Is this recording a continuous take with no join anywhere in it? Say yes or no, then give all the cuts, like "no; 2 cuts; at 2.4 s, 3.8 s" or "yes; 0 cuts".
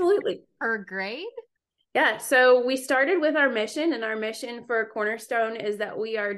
no; 1 cut; at 1.6 s